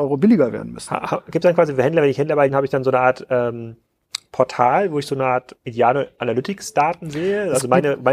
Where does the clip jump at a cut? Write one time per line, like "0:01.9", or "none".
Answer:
0:02.5